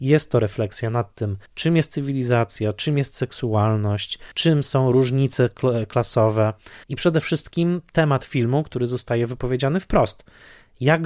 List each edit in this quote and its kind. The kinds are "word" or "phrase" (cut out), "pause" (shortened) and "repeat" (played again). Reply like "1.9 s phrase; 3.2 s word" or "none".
1.5 s pause; 4.3 s pause; 6.8 s pause